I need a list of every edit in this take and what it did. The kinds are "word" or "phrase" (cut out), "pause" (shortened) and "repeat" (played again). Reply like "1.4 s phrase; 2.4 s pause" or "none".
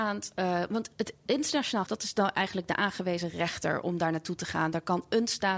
1.9 s word